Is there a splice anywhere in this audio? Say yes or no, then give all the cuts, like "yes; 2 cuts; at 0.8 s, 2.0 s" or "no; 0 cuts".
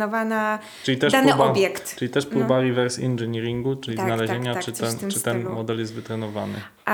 no; 0 cuts